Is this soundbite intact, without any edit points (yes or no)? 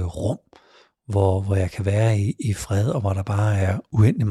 yes